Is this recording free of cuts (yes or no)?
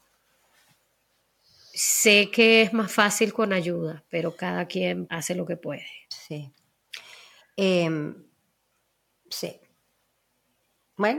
no